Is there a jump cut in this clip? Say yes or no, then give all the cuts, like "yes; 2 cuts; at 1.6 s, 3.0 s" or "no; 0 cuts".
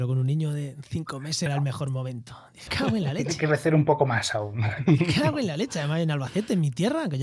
yes; 2 cuts; at 1.5 s, 2.7 s